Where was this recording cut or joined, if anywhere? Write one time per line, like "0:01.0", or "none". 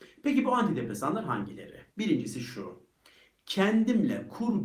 0:01.9